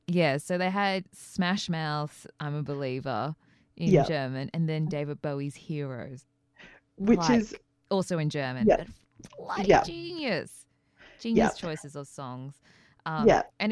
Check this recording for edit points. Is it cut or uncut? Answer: uncut